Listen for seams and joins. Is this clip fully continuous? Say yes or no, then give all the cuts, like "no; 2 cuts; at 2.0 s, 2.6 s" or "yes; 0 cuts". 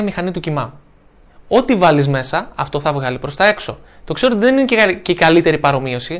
yes; 0 cuts